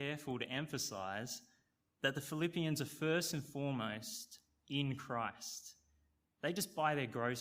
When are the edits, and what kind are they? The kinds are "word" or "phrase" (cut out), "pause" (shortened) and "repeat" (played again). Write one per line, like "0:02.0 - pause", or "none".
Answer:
none